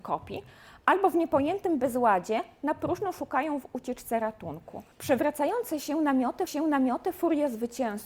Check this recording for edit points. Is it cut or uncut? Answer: cut